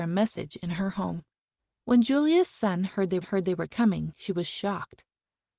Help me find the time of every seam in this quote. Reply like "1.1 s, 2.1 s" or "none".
1.6 s, 3.2 s